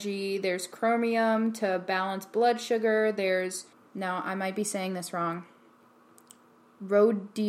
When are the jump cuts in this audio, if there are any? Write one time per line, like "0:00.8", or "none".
0:03.7